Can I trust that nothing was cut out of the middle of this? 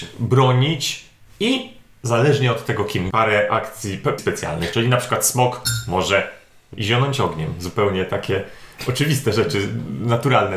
no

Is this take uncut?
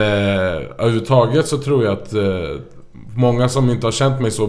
yes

